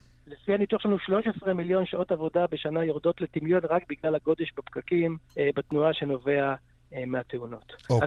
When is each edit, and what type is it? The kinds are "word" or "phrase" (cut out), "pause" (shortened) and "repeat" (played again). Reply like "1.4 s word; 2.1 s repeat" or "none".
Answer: 5.3 s pause